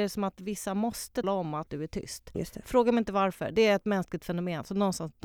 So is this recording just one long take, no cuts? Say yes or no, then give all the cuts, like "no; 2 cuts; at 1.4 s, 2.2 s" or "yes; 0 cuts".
no; 2 cuts; at 1.2 s, 1.7 s